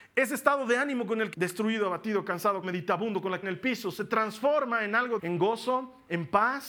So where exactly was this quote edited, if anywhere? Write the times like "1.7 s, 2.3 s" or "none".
1.3 s, 2.6 s, 3.4 s, 5.2 s